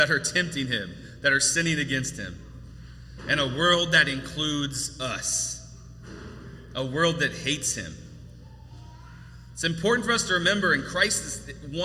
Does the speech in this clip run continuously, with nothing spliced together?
yes; 0 cuts

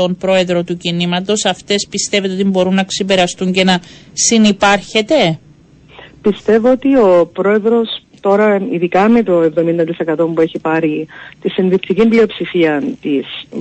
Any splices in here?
no; 0 cuts

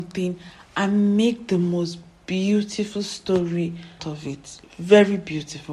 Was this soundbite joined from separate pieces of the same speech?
yes; 1 cut; at 4.0 s

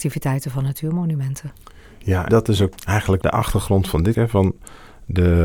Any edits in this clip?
yes; 4 cuts; at 2.3 s, 2.8 s, 3.2 s, 4.1 s

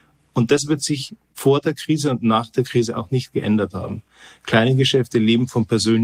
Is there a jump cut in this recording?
no; 0 cuts

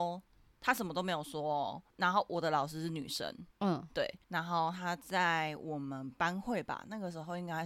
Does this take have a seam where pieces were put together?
yes; 3 cuts; at 1.9 s, 3.5 s, 4.2 s

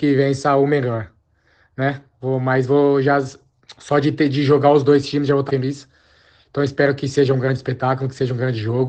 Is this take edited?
yes; 1 cut; at 5.5 s

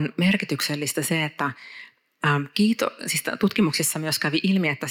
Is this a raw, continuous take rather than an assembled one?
yes; 0 cuts

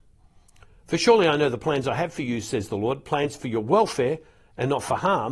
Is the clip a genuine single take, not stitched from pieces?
yes; 0 cuts

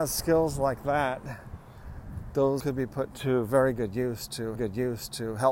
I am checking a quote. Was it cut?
yes; 2 cuts; at 2.6 s, 4.5 s

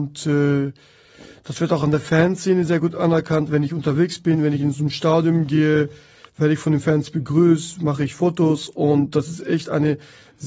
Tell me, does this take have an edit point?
no; 0 cuts

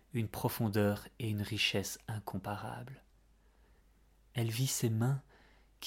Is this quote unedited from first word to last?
yes; 0 cuts

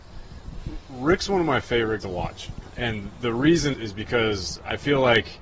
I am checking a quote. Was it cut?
yes; 2 cuts; at 2.0 s, 3.7 s

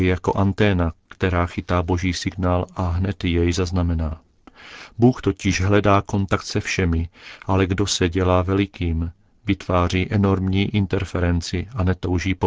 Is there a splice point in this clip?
no; 0 cuts

